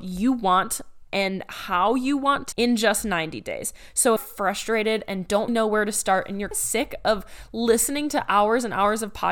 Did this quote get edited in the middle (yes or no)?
yes